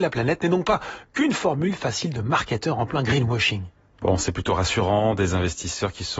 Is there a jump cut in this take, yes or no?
no